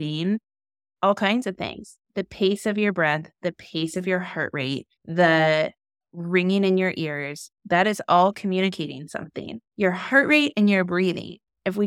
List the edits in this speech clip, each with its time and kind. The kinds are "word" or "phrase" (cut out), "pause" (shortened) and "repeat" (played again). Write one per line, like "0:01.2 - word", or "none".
0:02.0 - pause
0:04.9 - pause
0:07.6 - pause
0:09.6 - pause